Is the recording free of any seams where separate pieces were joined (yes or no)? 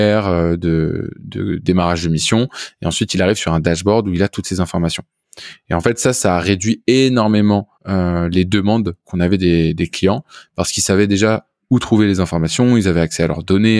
no